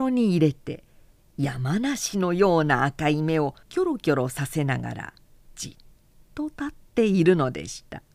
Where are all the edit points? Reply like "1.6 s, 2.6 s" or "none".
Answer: 3.6 s